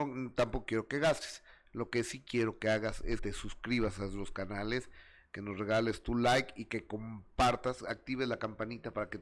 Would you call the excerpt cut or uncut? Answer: cut